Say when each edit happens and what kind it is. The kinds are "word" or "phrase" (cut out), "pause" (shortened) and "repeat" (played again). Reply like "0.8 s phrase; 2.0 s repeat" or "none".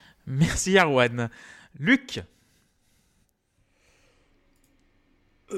none

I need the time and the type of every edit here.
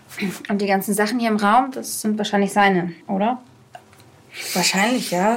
3.0 s pause

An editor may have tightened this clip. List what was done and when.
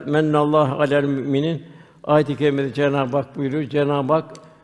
none

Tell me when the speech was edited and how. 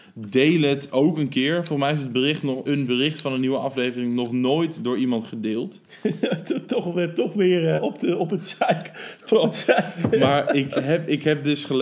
2.7 s word; 7.8 s word

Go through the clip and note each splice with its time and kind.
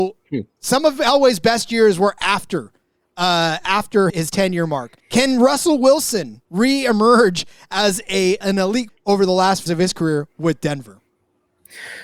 4.1 s word; 5.0 s pause; 6.4 s pause; 8.4 s word; 8.9 s word; 9.7 s word

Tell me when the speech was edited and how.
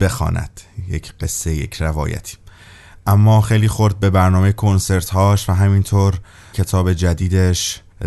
6.5 s word

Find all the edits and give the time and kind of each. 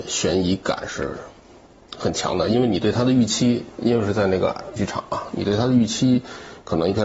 4.8 s word

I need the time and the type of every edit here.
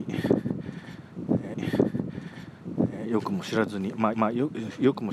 1.5 s repeat; 4.1 s repeat

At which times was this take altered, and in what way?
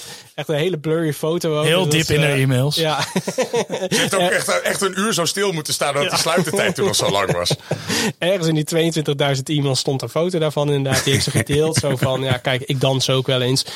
none

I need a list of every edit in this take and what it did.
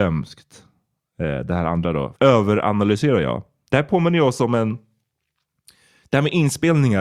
2.2 s word

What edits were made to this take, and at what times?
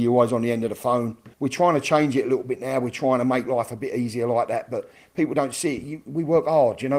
1.3 s pause

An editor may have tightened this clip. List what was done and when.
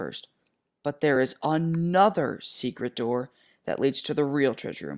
none

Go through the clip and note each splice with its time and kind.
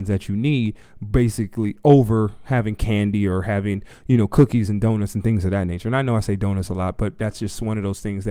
none

